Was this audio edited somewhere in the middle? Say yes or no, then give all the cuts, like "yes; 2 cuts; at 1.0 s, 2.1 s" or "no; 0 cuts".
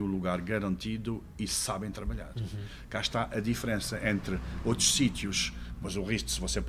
no; 0 cuts